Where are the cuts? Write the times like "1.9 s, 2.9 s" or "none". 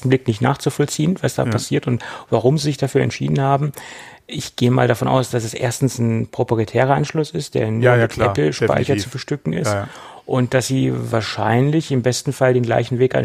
none